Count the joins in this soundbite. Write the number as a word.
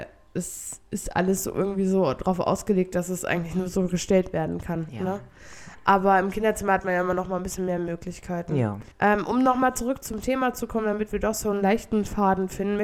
one